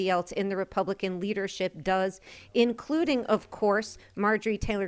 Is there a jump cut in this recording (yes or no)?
no